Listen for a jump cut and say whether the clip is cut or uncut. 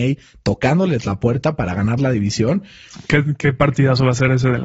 uncut